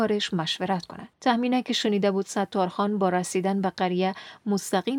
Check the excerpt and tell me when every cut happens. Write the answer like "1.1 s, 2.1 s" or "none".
1.1 s